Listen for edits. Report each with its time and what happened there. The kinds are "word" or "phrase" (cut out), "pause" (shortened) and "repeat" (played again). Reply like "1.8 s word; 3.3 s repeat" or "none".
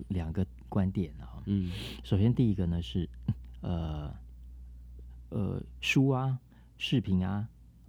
none